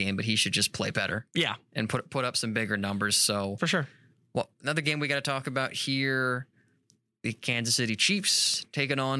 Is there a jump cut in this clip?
no; 0 cuts

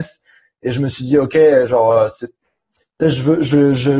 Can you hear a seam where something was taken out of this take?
no; 0 cuts

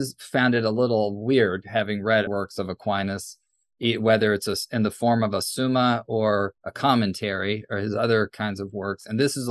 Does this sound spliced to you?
yes; 2 cuts; at 2.3 s, 6.6 s

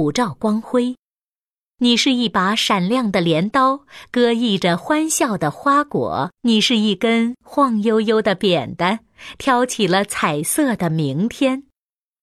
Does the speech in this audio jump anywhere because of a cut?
yes; 1 cut; at 6.4 s

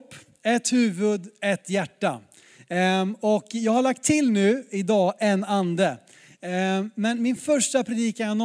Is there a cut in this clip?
no; 0 cuts

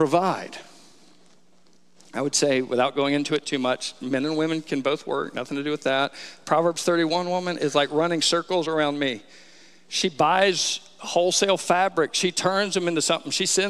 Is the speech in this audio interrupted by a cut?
no; 0 cuts

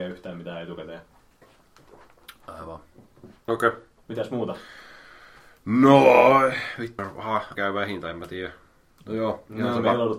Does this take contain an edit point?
yes; 3 cuts; at 3.4 s, 7.0 s, 7.5 s

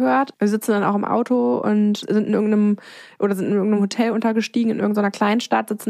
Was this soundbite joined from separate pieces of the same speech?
no; 0 cuts

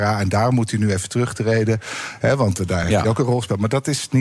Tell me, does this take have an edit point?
no; 0 cuts

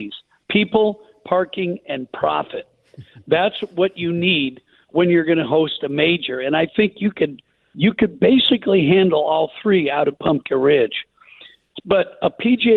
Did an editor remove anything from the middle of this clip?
no; 0 cuts

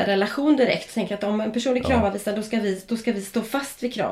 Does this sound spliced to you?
no; 0 cuts

